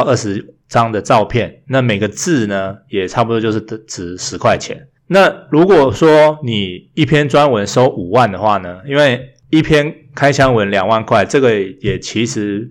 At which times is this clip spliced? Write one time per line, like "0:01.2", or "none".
0:05.0
0:09.4

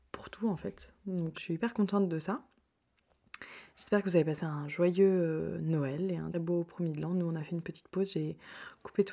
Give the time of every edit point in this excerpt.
0:01.3
0:06.3

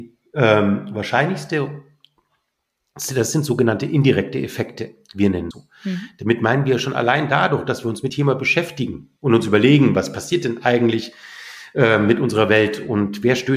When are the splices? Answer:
0:05.5
0:08.1
0:09.2

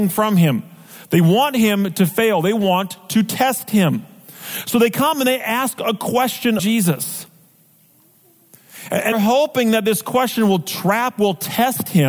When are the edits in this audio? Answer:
0:06.6
0:09.1

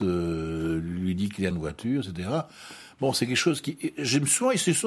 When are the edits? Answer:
0:01.5

